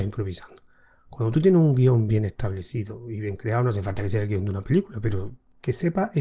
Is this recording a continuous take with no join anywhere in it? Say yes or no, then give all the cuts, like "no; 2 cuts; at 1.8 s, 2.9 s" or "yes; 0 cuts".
yes; 0 cuts